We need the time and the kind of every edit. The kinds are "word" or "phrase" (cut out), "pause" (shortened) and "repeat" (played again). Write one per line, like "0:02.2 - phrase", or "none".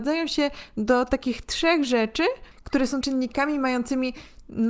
0:03.0 - word